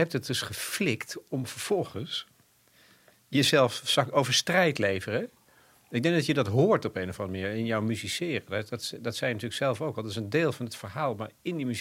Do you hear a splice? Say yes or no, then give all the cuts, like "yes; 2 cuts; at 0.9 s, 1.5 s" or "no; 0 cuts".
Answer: yes; 1 cut; at 4.1 s